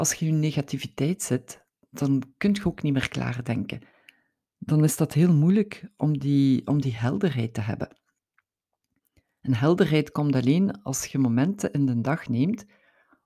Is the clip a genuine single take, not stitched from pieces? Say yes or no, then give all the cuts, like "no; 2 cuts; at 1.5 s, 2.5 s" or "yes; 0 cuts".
yes; 0 cuts